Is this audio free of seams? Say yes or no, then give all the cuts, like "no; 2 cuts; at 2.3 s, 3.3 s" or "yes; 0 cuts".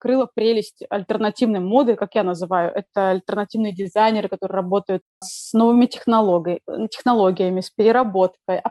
no; 1 cut; at 5.2 s